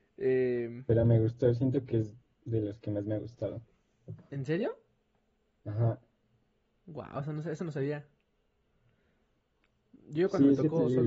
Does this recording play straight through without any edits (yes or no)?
yes